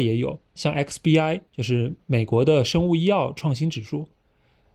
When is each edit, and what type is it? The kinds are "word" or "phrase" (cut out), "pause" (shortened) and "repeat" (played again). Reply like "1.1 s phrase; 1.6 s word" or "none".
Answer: 1.5 s pause